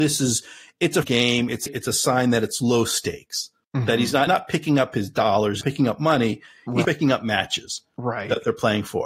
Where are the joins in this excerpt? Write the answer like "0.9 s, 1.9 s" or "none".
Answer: 1.0 s, 1.7 s, 4.3 s, 5.6 s, 6.8 s